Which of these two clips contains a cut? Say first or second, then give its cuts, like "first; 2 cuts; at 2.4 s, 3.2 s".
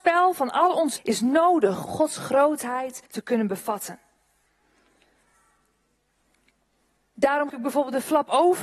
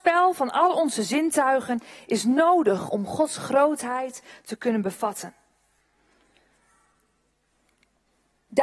first; 4 cuts; at 1.0 s, 1.9 s, 3.1 s, 7.5 s